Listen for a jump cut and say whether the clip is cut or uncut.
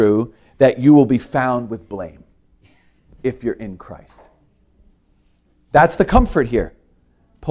uncut